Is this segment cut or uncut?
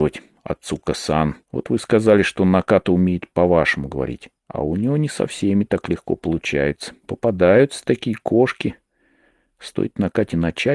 cut